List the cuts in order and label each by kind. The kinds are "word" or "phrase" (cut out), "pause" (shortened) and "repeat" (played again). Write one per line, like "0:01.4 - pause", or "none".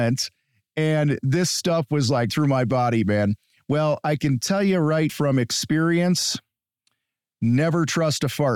0:02.3 - word
0:05.1 - word